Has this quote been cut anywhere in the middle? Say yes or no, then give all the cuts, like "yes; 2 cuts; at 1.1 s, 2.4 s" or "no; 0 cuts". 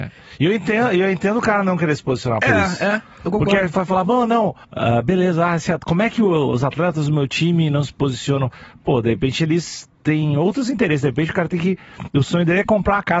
yes; 2 cuts; at 4.6 s, 9.9 s